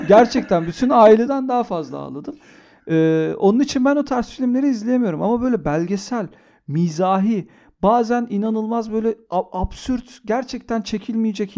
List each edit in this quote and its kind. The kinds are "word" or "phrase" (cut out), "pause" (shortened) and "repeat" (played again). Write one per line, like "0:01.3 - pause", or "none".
none